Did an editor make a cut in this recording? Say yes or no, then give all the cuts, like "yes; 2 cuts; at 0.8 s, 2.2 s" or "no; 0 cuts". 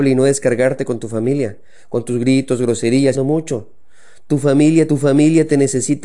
yes; 2 cuts; at 3.1 s, 4.9 s